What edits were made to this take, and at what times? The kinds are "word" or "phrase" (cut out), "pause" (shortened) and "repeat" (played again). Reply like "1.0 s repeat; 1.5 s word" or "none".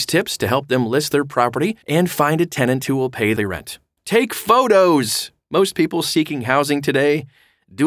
1.8 s pause; 3.4 s word; 4.0 s pause